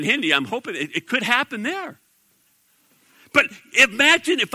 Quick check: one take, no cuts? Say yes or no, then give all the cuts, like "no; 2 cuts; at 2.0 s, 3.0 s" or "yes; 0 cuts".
yes; 0 cuts